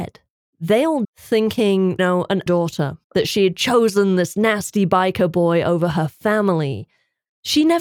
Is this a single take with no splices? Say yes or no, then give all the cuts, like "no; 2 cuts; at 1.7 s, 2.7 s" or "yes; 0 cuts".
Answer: no; 4 cuts; at 1.0 s, 2.0 s, 2.5 s, 3.0 s